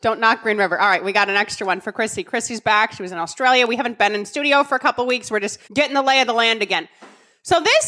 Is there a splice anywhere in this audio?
yes; 1 cut; at 5.6 s

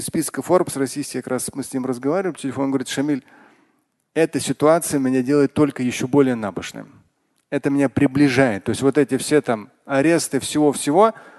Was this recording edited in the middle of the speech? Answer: no; 0 cuts

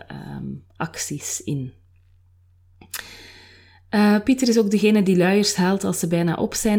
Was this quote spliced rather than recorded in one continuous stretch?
no; 0 cuts

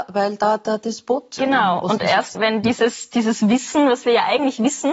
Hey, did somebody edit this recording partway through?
yes; 1 cut; at 2.3 s

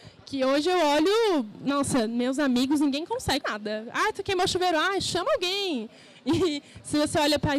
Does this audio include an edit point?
yes; 1 cut; at 3.4 s

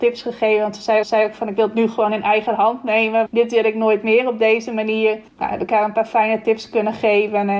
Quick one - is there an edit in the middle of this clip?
yes; 3 cuts; at 1.0 s, 3.3 s, 5.3 s

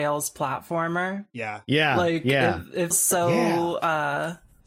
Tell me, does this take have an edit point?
yes; 1 cut; at 2.9 s

